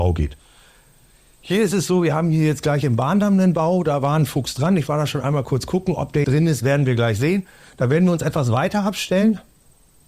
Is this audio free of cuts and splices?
no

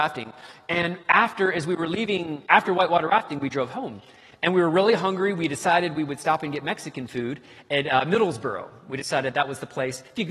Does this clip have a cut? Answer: no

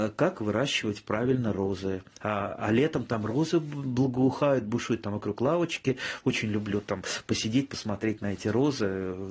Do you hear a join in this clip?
no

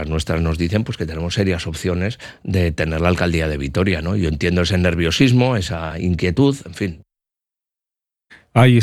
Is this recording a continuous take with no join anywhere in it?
yes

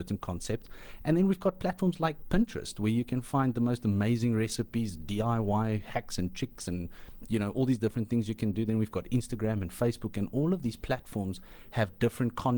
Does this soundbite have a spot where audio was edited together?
no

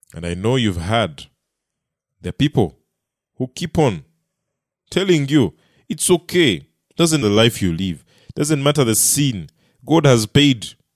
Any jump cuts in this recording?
yes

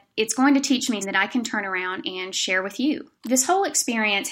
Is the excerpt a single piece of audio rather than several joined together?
no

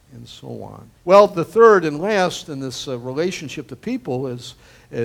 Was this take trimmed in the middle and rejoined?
yes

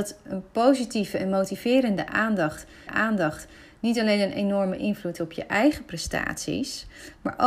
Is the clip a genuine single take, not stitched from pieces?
no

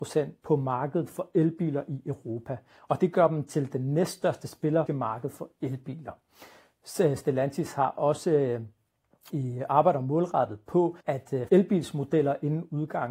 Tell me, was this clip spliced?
yes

